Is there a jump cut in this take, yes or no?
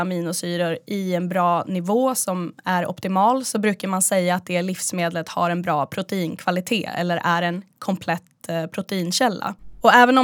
no